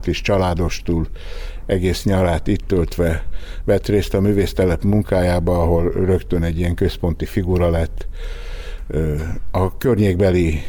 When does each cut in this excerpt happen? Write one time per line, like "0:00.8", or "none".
none